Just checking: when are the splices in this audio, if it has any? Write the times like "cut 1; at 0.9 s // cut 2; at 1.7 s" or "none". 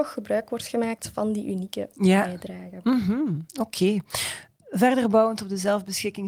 none